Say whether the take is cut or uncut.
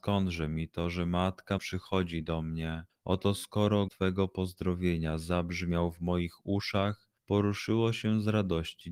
cut